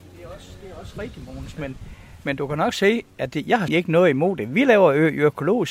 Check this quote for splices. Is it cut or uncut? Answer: cut